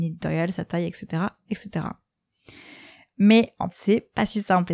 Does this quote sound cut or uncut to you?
cut